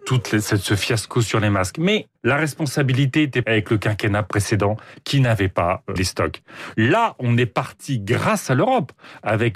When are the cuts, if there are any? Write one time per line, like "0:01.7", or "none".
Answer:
0:02.2
0:03.4
0:06.0